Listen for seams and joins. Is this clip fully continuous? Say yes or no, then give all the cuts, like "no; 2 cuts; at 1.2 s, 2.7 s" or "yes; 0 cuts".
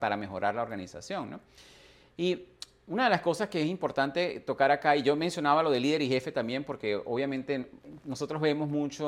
yes; 0 cuts